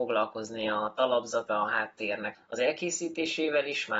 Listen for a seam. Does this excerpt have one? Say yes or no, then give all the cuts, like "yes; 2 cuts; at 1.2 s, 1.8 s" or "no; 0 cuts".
yes; 2 cuts; at 1.5 s, 2.3 s